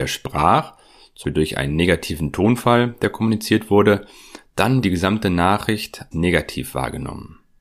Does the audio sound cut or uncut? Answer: cut